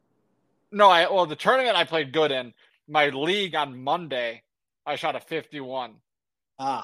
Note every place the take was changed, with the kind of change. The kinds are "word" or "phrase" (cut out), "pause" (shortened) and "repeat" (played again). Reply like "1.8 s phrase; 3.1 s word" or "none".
none